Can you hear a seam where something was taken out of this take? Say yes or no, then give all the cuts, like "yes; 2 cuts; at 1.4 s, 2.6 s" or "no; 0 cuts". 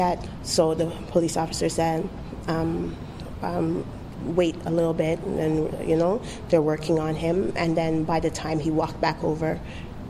no; 0 cuts